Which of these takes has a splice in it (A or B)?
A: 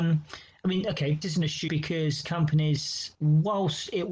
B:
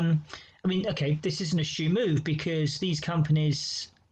A